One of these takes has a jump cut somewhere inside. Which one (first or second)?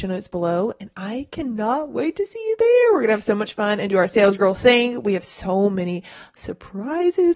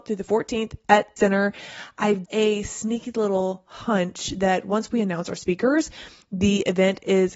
second